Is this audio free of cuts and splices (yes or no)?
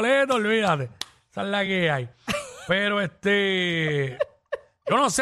yes